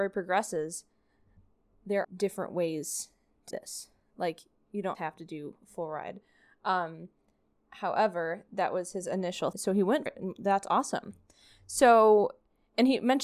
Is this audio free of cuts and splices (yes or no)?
no